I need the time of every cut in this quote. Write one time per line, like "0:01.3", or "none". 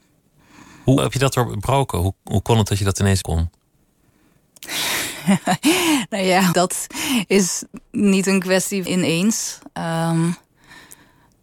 0:01.0
0:03.2
0:06.5
0:08.9